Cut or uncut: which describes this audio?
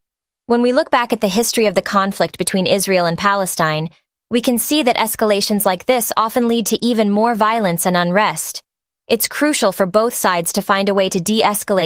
uncut